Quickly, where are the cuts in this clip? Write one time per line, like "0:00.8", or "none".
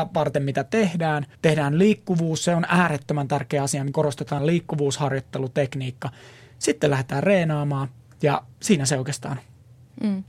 0:01.3
0:03.9
0:04.4
0:08.5